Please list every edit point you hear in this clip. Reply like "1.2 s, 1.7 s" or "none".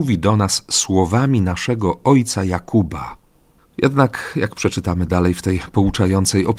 none